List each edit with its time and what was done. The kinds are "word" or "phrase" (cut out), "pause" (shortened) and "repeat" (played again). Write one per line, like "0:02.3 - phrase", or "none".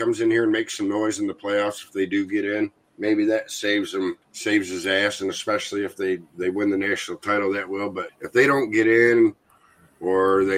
0:02.8 - pause
0:04.2 - pause
0:08.1 - word